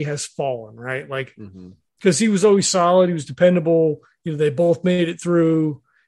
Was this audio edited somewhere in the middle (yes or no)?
no